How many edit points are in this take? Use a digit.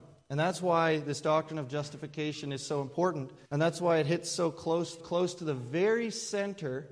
2